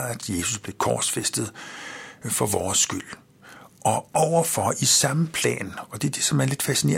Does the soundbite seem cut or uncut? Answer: uncut